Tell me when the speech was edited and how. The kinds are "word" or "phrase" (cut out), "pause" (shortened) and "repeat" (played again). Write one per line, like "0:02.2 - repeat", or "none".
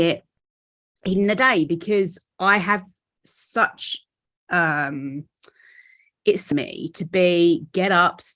0:06.5 - phrase